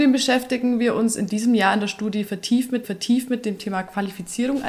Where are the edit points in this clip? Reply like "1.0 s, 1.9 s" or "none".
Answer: 2.8 s